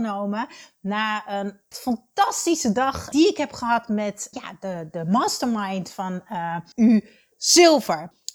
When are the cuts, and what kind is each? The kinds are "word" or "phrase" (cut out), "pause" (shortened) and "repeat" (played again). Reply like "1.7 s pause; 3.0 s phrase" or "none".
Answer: 1.7 s word; 3.1 s word; 4.3 s word; 6.7 s word